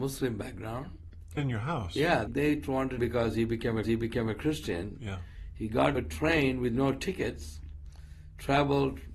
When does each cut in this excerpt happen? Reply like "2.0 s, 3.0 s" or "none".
1.4 s, 2.3 s, 3.0 s, 3.8 s, 5.9 s